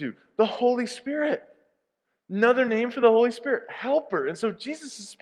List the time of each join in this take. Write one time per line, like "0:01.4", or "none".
none